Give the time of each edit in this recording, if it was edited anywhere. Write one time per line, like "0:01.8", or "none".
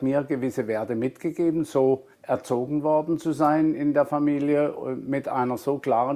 0:02.1